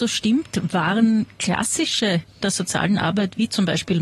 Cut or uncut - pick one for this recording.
cut